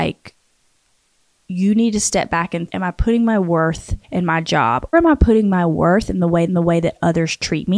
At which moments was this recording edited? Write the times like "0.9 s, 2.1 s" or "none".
2.7 s, 4.0 s, 4.9 s, 6.5 s